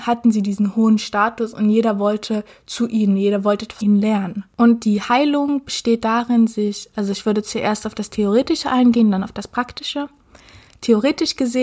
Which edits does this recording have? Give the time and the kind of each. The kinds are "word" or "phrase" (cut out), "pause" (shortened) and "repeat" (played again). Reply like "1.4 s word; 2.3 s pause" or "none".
3.8 s word; 4.5 s pause; 6.9 s phrase